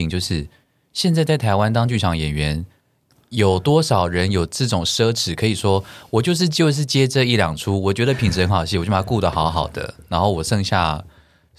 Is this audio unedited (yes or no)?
yes